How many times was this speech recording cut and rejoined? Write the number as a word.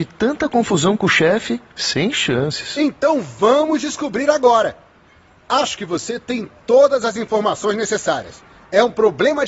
zero